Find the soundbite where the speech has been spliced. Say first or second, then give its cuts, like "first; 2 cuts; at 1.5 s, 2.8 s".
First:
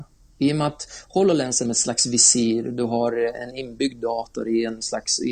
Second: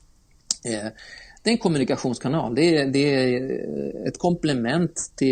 first; 1 cut; at 1.7 s